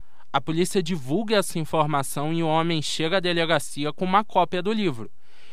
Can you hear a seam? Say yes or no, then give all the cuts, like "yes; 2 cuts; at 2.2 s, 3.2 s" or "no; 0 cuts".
no; 0 cuts